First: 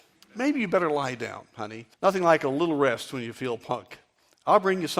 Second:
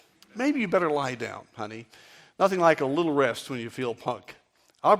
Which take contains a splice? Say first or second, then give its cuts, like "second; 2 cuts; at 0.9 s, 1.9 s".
first; 1 cut; at 1.9 s